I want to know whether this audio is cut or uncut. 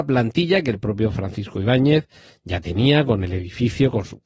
uncut